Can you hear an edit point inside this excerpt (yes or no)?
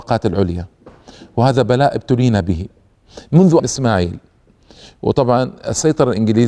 yes